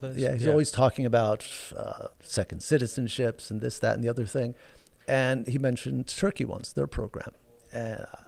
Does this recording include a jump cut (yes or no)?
yes